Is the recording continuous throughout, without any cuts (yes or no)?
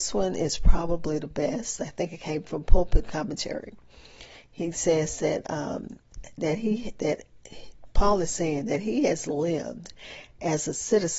yes